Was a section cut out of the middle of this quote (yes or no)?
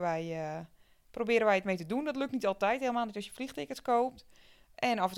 no